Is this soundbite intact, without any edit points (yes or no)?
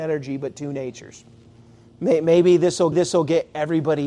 no